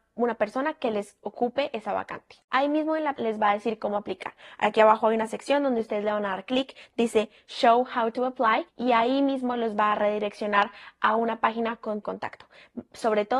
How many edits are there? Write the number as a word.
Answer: four